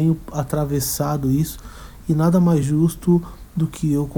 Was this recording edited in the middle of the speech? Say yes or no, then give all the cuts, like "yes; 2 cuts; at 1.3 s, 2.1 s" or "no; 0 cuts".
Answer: no; 0 cuts